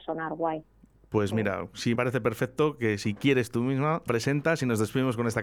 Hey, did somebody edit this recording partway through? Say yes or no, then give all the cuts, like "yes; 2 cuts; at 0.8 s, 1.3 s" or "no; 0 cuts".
yes; 2 cuts; at 1.9 s, 4.1 s